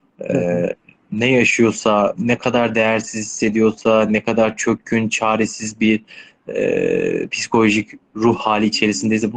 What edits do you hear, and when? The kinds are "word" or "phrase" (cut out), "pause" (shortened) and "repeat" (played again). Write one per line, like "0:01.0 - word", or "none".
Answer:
none